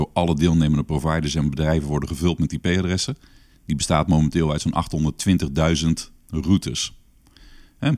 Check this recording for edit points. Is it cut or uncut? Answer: uncut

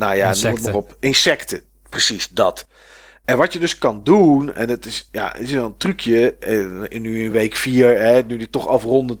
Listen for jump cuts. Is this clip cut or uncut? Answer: uncut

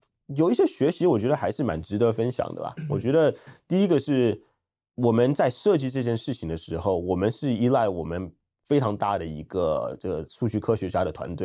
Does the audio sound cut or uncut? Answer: uncut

